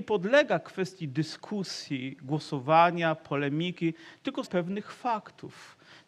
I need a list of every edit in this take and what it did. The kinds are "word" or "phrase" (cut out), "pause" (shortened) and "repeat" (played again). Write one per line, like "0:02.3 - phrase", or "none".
0:04.5 - word